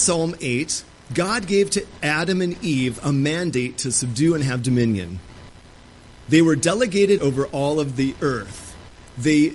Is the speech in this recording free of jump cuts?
no; 1 cut; at 7.2 s

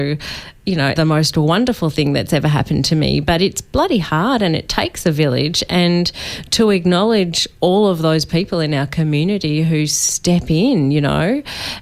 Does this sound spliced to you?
yes; 1 cut; at 1.0 s

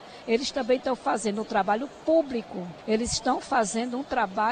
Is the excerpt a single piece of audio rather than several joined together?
no; 1 cut; at 2.8 s

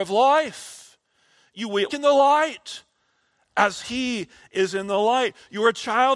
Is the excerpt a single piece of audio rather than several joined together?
no; 1 cut; at 1.9 s

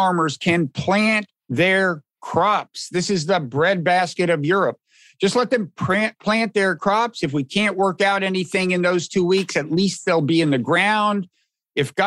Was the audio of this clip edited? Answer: no; 0 cuts

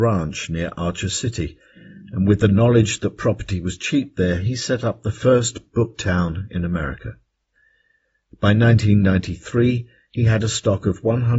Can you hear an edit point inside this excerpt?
no; 0 cuts

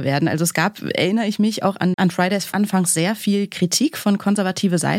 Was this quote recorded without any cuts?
no; 2 cuts; at 1.9 s, 2.5 s

